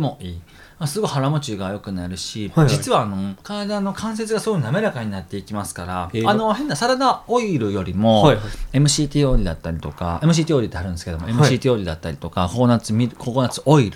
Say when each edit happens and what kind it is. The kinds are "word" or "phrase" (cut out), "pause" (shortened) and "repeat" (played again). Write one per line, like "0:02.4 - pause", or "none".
0:03.4 - pause